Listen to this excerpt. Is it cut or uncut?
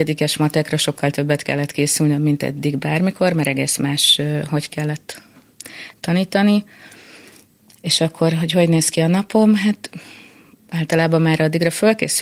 uncut